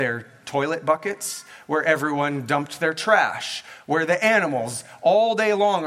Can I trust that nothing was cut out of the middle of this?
yes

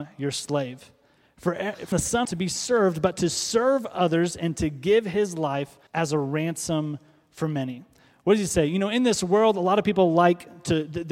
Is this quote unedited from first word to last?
no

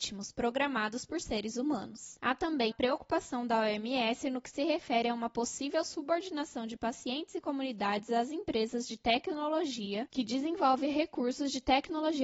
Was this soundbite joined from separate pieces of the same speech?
yes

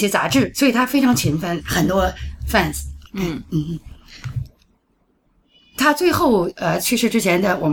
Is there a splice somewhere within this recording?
yes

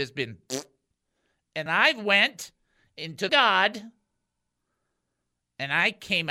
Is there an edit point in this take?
yes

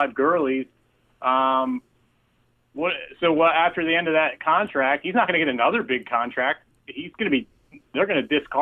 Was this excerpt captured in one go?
yes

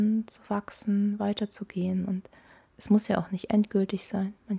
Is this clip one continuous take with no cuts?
yes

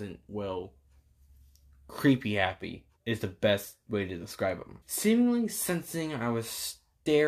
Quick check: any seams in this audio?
yes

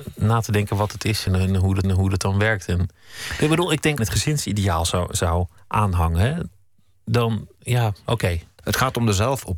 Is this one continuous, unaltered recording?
no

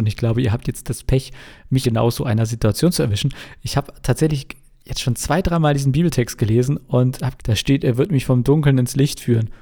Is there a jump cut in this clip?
yes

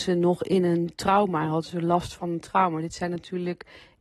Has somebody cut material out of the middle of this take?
no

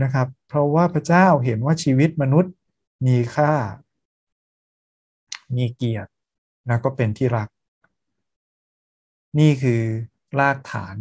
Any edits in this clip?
yes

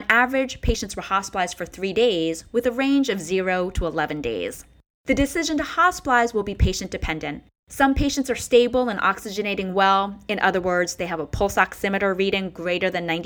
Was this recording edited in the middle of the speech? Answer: no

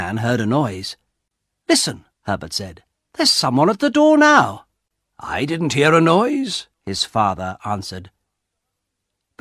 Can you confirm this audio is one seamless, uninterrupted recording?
no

